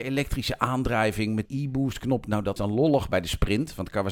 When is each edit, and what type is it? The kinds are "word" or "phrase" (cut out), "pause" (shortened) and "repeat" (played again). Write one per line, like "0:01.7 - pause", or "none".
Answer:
0:01.5 - word
0:02.6 - word